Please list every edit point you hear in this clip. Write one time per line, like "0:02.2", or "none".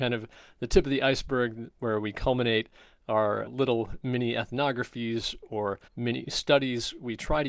0:03.5
0:05.9